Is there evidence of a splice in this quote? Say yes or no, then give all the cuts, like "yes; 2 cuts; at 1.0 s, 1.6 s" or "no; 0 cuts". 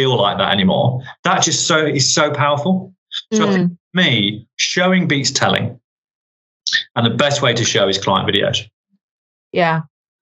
no; 0 cuts